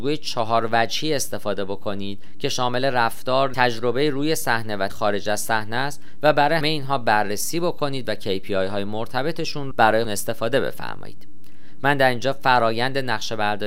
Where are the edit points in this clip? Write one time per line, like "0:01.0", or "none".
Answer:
0:03.5
0:04.9
0:06.6
0:09.7
0:10.0